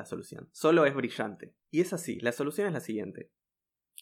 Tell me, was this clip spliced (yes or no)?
yes